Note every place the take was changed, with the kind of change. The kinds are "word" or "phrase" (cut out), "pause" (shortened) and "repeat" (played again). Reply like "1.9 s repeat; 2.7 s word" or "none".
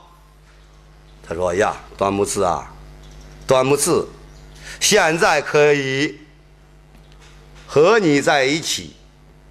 1.9 s pause